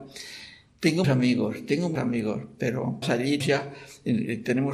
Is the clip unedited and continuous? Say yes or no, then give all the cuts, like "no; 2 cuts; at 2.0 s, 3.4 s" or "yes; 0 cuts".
no; 4 cuts; at 1.0 s, 1.9 s, 3.0 s, 3.4 s